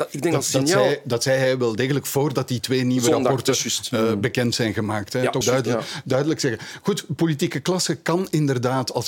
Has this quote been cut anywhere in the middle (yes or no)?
yes